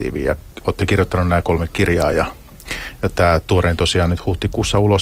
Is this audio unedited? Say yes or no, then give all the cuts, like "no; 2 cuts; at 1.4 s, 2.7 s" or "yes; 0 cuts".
yes; 0 cuts